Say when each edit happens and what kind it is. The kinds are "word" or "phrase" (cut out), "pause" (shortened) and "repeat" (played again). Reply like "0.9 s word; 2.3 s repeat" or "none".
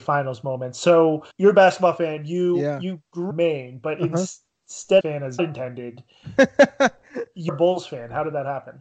1.3 s pause; 3.3 s phrase; 5.0 s phrase; 5.4 s word; 7.5 s word